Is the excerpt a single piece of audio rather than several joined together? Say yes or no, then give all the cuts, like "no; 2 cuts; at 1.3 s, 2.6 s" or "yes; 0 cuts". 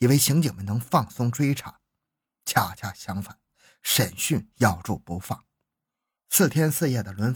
yes; 0 cuts